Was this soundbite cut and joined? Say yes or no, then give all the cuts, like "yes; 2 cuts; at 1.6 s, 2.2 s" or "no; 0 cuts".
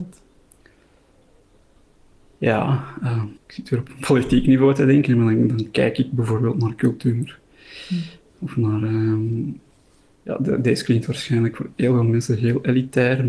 yes; 2 cuts; at 3.4 s, 9.9 s